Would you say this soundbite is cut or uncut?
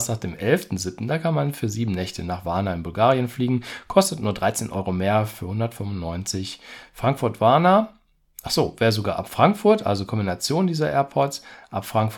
uncut